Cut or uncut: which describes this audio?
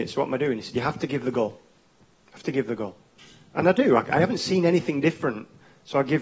uncut